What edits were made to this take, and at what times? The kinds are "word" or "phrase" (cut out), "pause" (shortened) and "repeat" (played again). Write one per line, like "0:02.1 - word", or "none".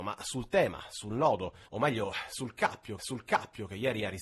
0:01.7 - pause
0:03.0 - repeat

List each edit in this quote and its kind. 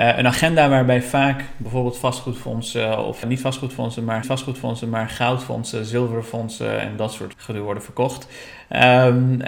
0:03.2 - word
0:04.2 - repeat
0:07.3 - word

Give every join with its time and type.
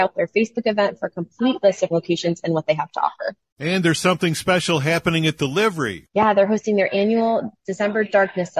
0:01.9 - word

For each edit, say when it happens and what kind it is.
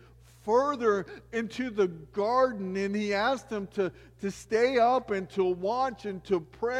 none

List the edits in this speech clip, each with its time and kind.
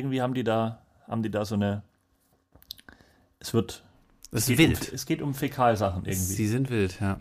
none

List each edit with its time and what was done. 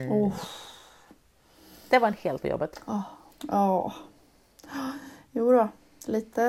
0:02.4 - phrase
0:03.3 - pause

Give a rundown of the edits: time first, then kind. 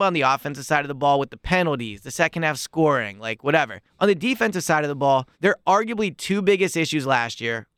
0:03.8 - pause
0:05.3 - pause

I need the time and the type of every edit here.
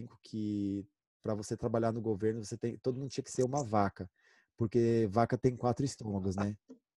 none

